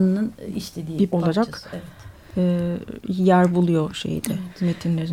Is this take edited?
yes; 1 cut; at 1.1 s

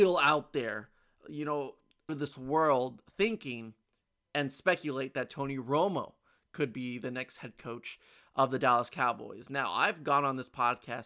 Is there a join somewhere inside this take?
yes; 1 cut; at 2.1 s

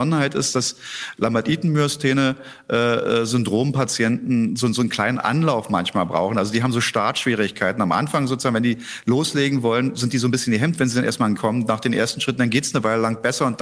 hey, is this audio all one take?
no; 1 cut; at 11.4 s

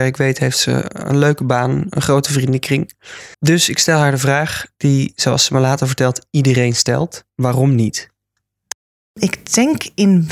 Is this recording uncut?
no; 2 cuts; at 3.3 s, 7.3 s

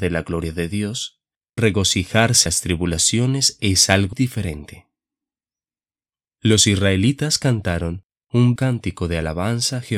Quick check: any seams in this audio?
yes; 4 cuts; at 1.6 s, 2.5 s, 4.1 s, 8.6 s

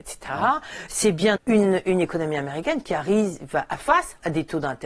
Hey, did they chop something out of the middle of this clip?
yes; 2 cuts; at 1.4 s, 3.8 s

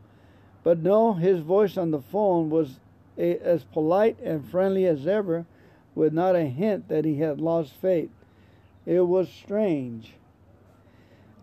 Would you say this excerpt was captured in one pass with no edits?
yes; 0 cuts

